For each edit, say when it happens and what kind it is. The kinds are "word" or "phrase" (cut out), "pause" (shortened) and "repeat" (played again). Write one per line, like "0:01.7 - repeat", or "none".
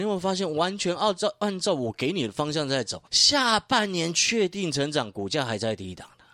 0:03.1 - pause